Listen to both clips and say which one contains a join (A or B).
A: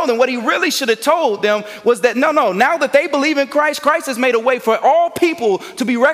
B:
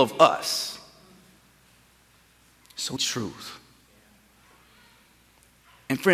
B